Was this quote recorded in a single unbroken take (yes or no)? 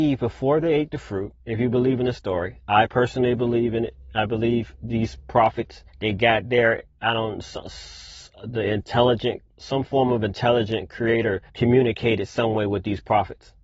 no